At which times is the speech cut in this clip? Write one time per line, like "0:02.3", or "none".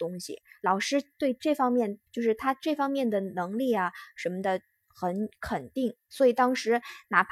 0:02.1